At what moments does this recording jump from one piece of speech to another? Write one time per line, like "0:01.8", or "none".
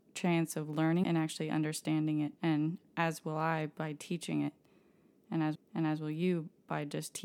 0:01.0
0:02.4
0:05.5